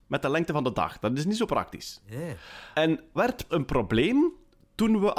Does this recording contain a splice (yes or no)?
yes